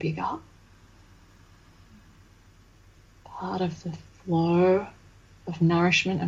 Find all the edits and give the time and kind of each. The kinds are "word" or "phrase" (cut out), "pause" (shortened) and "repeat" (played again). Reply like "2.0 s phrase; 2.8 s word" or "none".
none